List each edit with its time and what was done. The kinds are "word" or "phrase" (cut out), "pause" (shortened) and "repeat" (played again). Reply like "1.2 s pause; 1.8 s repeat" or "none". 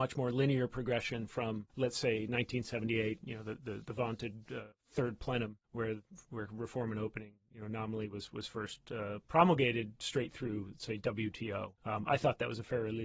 1.7 s pause; 4.7 s pause; 5.6 s pause; 11.8 s pause